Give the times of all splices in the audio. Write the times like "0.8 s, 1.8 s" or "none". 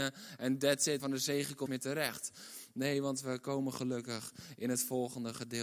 1.0 s, 1.7 s

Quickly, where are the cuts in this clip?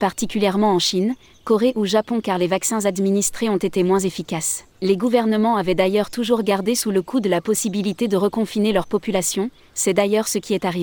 4.7 s

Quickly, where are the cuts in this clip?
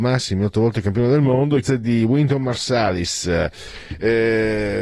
1.6 s

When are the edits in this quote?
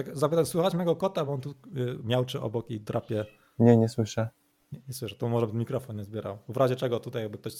none

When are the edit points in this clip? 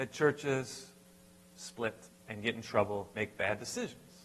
2.0 s, 3.1 s

